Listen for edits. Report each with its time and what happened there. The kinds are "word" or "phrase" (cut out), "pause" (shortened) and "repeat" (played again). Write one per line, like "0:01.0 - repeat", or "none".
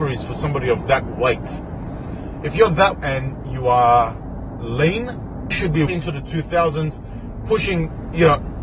0:02.9 - word
0:05.5 - word
0:05.9 - word